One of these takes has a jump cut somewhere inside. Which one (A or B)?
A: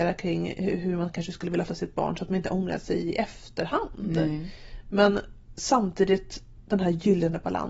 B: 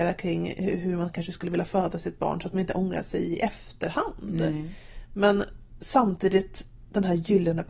A